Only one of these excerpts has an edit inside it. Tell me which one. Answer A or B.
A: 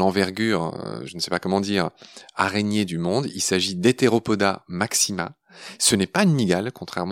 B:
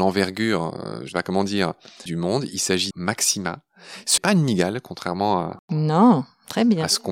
B